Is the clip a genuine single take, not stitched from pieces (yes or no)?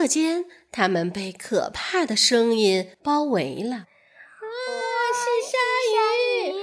no